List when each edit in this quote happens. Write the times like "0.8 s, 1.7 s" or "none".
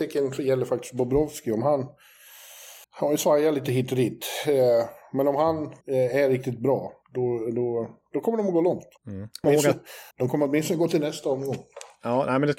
2.8 s, 5.8 s, 7.0 s, 9.0 s, 9.4 s, 10.1 s

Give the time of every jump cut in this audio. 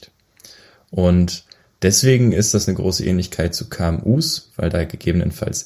none

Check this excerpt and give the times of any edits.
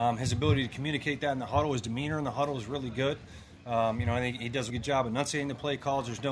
4.7 s

